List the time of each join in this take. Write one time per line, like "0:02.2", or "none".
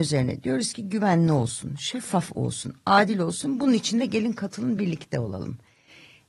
none